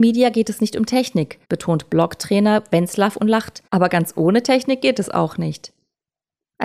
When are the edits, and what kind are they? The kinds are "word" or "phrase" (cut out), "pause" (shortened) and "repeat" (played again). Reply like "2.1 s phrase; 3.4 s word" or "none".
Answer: 1.4 s pause; 3.7 s pause